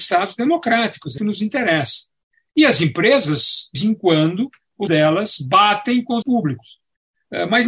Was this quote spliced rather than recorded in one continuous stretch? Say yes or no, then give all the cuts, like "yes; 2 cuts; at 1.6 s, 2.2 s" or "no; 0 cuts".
yes; 4 cuts; at 1.2 s, 3.7 s, 4.9 s, 6.2 s